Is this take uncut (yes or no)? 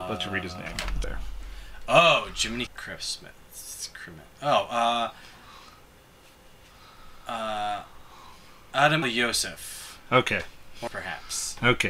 no